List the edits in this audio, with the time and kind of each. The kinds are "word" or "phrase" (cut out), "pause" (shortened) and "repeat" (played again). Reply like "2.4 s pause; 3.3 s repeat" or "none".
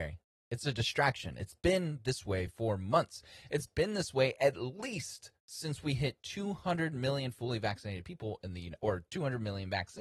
none